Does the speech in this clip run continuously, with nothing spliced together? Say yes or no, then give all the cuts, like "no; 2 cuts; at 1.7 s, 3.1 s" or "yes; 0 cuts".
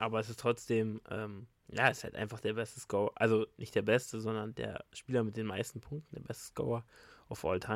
no; 1 cut; at 1.5 s